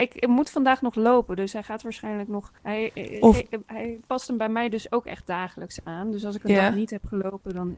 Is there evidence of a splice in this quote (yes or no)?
yes